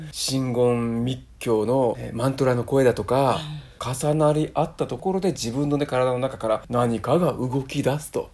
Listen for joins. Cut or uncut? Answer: uncut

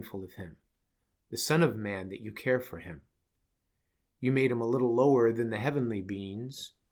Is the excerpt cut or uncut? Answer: uncut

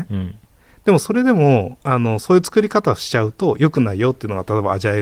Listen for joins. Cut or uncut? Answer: cut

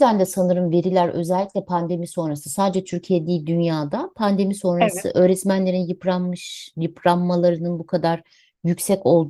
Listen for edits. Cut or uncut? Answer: uncut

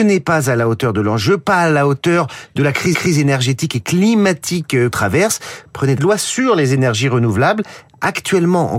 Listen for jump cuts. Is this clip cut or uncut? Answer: cut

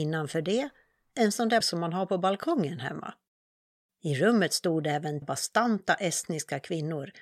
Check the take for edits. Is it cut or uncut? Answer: cut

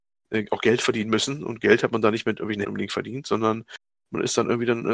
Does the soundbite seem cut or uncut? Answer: cut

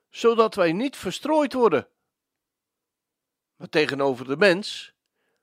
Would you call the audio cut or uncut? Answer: uncut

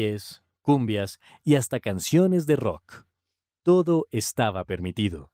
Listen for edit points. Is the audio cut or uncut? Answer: uncut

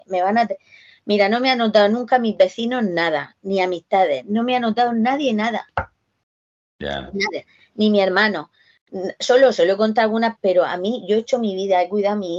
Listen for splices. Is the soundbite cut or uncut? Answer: cut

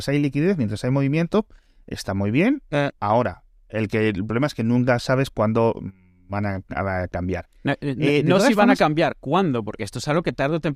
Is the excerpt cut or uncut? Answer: uncut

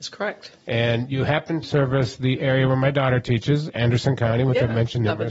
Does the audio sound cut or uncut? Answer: cut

